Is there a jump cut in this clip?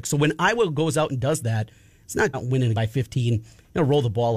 yes; 2 cuts; at 2.3 s, 2.7 s

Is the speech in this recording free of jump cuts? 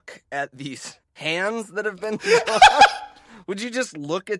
no; 1 cut; at 1.1 s

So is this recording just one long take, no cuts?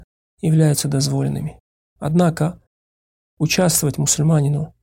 yes; 0 cuts

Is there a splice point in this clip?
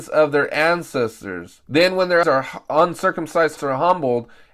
yes; 3 cuts; at 1.6 s, 2.2 s, 3.6 s

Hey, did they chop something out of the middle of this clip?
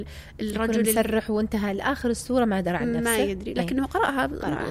no; 0 cuts

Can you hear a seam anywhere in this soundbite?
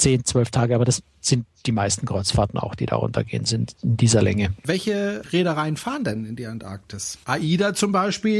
no; 0 cuts

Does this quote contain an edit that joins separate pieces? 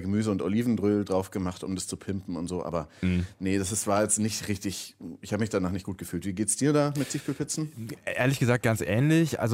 no; 0 cuts

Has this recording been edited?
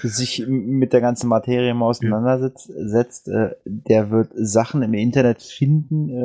no; 0 cuts

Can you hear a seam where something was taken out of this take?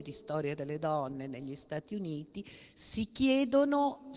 no; 0 cuts

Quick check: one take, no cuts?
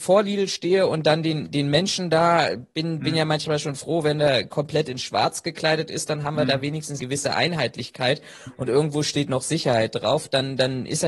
no; 1 cut; at 7.0 s

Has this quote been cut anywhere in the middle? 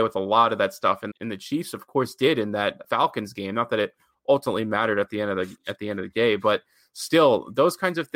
yes; 2 cuts; at 1.1 s, 2.8 s

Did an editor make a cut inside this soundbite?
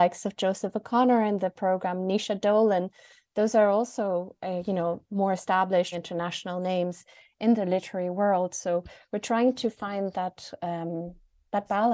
yes; 1 cut; at 5.9 s

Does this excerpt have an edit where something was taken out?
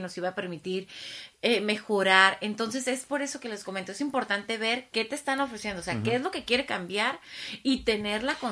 no; 0 cuts

